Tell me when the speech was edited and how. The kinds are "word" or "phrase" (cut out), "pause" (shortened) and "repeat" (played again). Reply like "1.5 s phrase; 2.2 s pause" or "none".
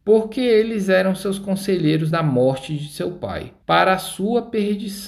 2.1 s word; 3.6 s pause